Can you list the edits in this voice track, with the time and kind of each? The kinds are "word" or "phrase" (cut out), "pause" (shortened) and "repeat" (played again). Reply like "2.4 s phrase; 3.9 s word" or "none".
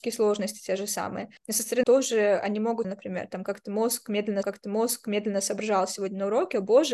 1.4 s pause; 1.8 s word; 2.8 s phrase; 4.4 s repeat